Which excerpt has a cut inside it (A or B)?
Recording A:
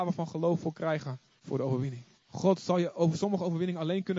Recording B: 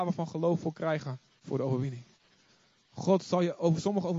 A